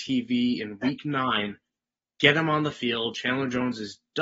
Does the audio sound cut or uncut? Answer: uncut